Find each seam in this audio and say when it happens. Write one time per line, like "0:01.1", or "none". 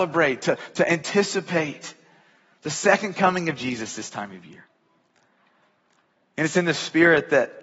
none

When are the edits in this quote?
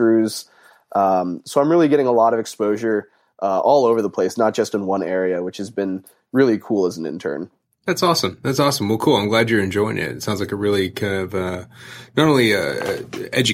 none

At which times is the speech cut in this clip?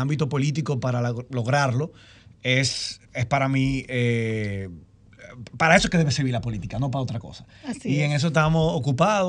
0:03.1

